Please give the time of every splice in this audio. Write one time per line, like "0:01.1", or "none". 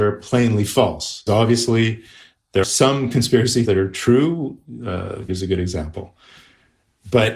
0:01.3
0:02.6
0:03.6
0:05.3